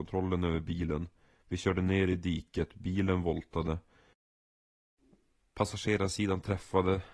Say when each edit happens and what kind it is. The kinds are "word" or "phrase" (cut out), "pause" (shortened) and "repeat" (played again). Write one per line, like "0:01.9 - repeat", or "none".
none